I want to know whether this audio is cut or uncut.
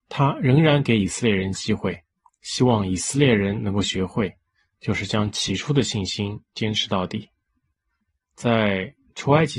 uncut